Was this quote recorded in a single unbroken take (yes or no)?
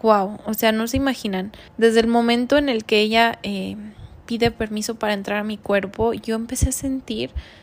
no